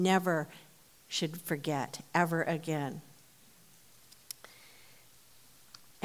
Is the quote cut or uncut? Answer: uncut